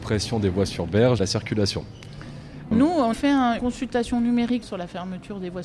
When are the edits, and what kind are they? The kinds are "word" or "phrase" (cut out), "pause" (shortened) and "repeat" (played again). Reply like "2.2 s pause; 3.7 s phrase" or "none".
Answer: 1.2 s word; 2.7 s word; 3.1 s word; 3.6 s word; 4.6 s word